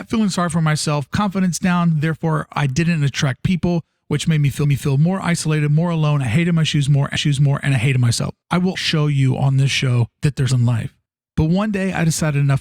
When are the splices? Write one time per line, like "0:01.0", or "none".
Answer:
0:01.1
0:04.6
0:07.2
0:08.4
0:08.7
0:10.1
0:10.5
0:11.1